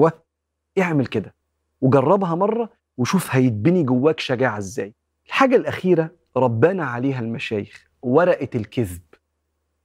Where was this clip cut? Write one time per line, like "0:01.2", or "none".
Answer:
none